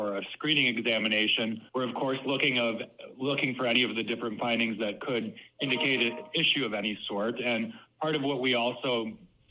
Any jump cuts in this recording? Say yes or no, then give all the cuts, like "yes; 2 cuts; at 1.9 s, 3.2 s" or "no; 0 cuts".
yes; 1 cut; at 1.7 s